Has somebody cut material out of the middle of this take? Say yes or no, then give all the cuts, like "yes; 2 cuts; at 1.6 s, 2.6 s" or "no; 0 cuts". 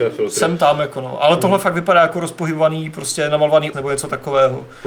yes; 1 cut; at 3.7 s